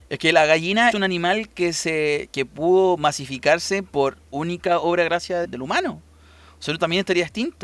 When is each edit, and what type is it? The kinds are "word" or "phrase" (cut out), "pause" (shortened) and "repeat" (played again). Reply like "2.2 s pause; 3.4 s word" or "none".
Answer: 0.9 s phrase; 3.9 s pause; 5.4 s phrase